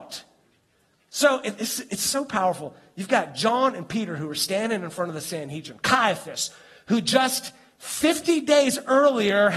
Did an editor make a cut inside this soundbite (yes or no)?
no